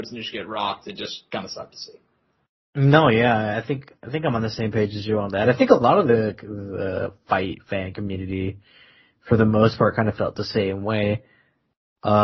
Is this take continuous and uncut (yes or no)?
yes